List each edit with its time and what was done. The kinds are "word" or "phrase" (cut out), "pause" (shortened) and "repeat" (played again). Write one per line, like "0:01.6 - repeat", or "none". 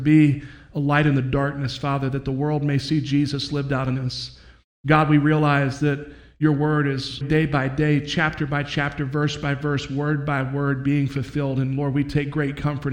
0:07.2 - word